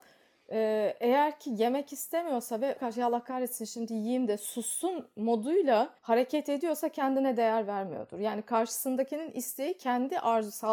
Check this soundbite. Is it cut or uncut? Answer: cut